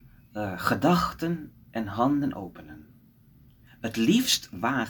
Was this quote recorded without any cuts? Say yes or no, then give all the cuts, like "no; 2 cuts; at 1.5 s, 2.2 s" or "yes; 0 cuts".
yes; 0 cuts